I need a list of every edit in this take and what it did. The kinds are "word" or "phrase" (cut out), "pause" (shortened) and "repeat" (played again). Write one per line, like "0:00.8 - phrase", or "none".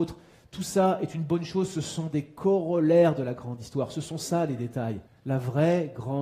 0:05.1 - pause